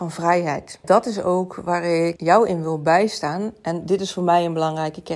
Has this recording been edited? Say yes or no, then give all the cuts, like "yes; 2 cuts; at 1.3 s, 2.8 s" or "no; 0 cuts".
no; 0 cuts